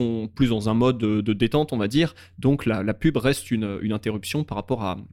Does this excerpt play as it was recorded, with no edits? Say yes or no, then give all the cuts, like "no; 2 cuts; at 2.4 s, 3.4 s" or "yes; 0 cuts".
yes; 0 cuts